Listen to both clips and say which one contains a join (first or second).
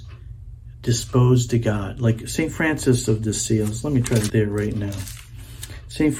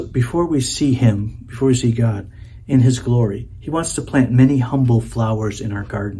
first